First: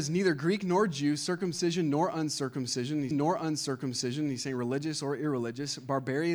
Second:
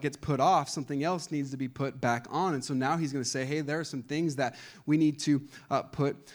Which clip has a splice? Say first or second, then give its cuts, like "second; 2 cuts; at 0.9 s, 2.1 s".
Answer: first; 1 cut; at 3.1 s